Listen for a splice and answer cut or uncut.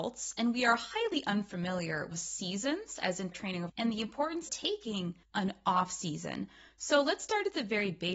cut